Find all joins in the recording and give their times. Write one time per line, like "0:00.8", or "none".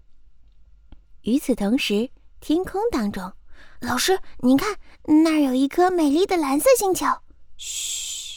0:03.8